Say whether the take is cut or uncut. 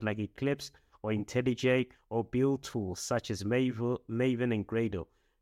uncut